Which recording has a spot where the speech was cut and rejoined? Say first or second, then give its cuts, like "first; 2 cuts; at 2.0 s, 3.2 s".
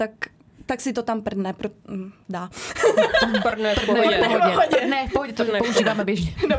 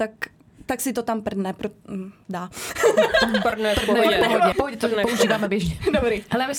second; 1 cut; at 4.5 s